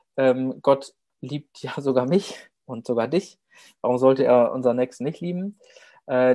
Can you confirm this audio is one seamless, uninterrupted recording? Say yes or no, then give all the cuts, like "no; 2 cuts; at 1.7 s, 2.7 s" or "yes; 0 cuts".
yes; 0 cuts